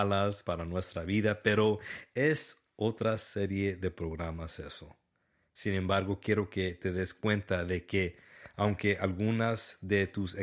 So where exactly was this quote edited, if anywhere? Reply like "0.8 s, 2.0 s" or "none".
none